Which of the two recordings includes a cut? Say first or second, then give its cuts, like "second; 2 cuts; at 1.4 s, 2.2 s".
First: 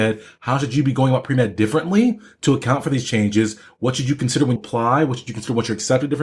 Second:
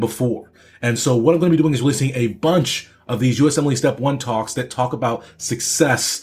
first; 1 cut; at 4.6 s